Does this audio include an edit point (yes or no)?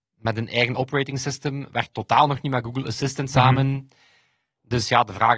no